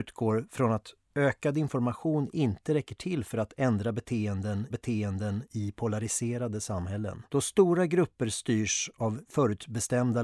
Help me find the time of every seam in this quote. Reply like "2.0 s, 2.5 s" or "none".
4.7 s, 7.3 s